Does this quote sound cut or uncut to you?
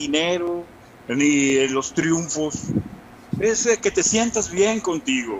uncut